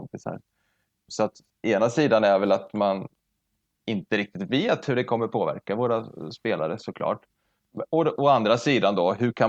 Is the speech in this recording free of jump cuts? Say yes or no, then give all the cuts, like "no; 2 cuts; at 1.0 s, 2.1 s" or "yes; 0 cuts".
yes; 0 cuts